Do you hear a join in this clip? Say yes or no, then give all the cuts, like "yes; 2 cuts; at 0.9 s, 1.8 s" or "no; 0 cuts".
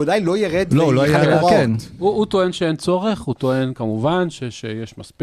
no; 0 cuts